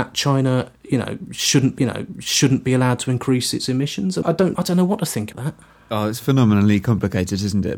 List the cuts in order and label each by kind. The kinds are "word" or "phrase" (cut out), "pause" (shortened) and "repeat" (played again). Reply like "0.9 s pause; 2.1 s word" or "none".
1.8 s repeat; 4.2 s word; 4.5 s word; 5.3 s word